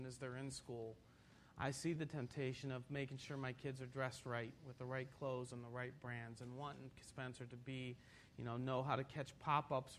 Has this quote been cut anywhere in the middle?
no; 0 cuts

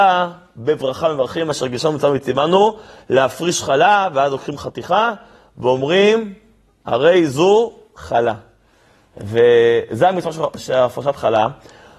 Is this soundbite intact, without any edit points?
yes; 0 cuts

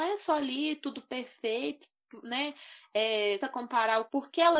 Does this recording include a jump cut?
yes; 1 cut; at 3.4 s

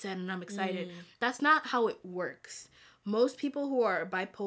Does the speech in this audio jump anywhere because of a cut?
no; 0 cuts

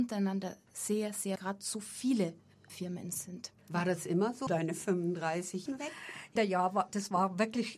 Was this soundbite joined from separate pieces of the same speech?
yes; 6 cuts; at 1.4 s, 2.7 s, 3.6 s, 4.5 s, 5.7 s, 6.4 s

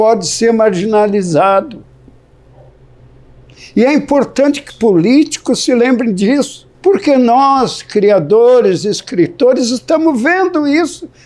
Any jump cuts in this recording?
yes; 2 cuts; at 4.7 s, 6.7 s

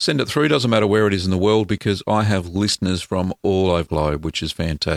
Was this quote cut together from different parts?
yes; 1 cut; at 3.9 s

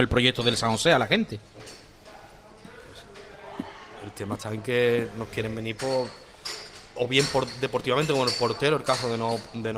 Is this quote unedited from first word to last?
yes; 0 cuts

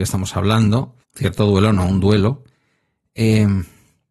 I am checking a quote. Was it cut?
yes; 1 cut; at 1.0 s

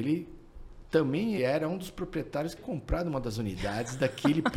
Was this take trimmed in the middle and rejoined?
yes; 2 cuts; at 1.4 s, 2.6 s

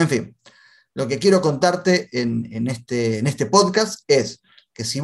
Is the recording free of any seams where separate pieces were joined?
yes; 0 cuts

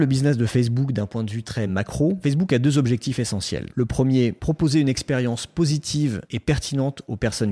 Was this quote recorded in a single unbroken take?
yes; 0 cuts

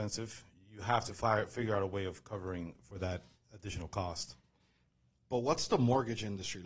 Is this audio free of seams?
yes; 0 cuts

